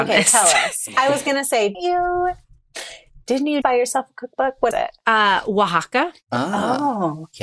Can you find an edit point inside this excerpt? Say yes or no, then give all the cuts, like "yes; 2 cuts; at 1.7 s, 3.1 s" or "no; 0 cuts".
yes; 3 cuts; at 1.7 s, 3.6 s, 4.7 s